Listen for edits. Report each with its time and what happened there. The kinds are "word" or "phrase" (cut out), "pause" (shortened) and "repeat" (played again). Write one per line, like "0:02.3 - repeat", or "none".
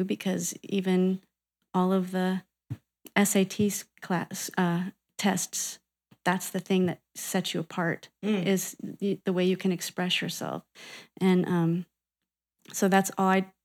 none